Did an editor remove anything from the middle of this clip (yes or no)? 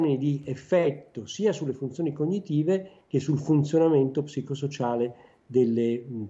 no